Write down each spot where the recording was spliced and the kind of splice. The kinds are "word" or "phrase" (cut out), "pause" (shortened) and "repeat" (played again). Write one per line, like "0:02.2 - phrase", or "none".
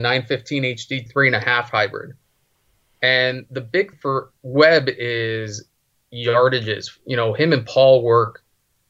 0:01.1 - word
0:03.9 - word
0:04.4 - pause